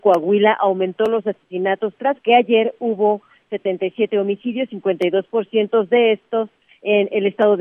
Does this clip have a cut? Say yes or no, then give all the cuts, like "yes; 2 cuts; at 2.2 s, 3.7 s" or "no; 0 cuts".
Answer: yes; 1 cut; at 2.2 s